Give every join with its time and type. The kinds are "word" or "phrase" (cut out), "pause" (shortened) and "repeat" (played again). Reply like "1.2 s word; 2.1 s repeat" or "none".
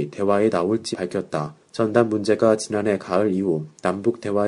0.9 s word; 1.6 s pause